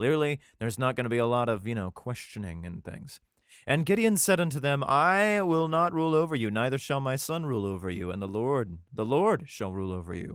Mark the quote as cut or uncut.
uncut